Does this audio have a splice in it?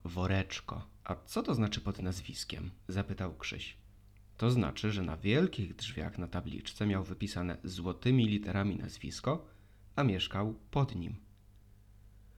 yes; 3 cuts; at 1.0 s, 2.8 s, 4.0 s

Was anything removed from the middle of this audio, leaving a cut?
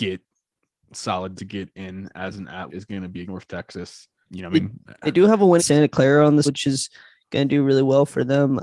yes; 6 cuts; at 1.4 s, 2.7 s, 3.2 s, 4.2 s, 5.6 s, 6.4 s

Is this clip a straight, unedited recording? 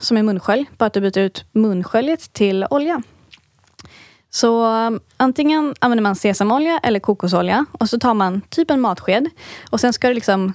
no; 1 cut; at 5.1 s

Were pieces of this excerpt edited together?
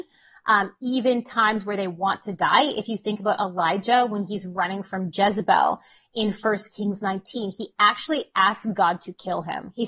no; 0 cuts

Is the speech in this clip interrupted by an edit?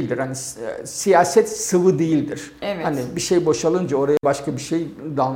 no; 0 cuts

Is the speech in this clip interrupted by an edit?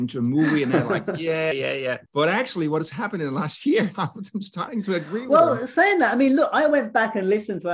yes; 2 cuts; at 1.5 s, 2.1 s

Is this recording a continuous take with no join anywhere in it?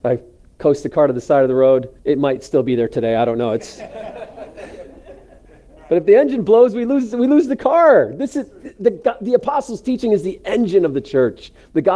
no; 1 cut; at 2.0 s

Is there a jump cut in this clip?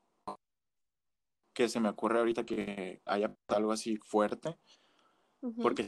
yes; 2 cuts; at 3.1 s, 4.0 s

